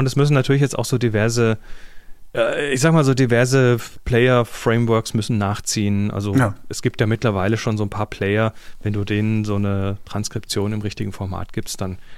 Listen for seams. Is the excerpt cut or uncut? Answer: uncut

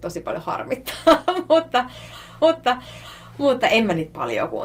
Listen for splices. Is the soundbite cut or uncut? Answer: cut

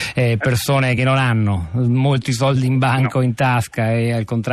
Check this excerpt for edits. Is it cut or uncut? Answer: uncut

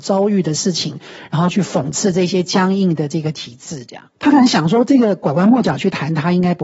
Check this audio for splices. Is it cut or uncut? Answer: cut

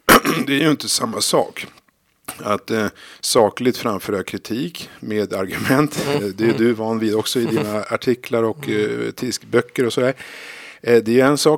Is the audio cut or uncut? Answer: uncut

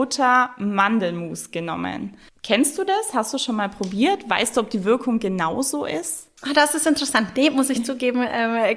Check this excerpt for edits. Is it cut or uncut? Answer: uncut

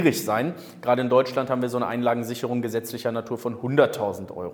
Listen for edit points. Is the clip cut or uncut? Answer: uncut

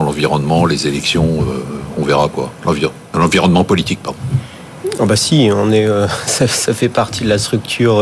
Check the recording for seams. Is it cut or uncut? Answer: uncut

